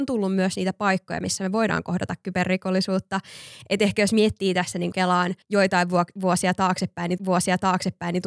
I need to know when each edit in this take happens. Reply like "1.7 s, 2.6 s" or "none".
4.9 s, 5.4 s, 7.2 s